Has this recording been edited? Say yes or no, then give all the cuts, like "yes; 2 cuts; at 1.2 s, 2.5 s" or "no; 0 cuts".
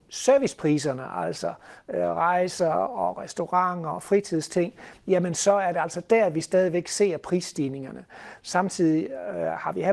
no; 0 cuts